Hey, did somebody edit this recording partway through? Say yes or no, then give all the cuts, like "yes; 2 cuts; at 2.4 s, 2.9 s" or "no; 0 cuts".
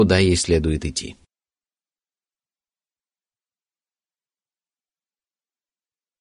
no; 0 cuts